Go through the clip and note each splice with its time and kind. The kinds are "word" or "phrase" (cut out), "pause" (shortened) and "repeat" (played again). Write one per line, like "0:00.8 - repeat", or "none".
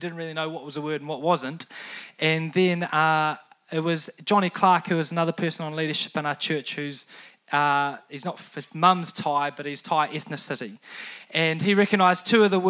none